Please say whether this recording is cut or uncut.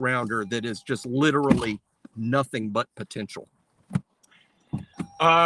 uncut